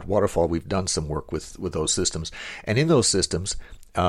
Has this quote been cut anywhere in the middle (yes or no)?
no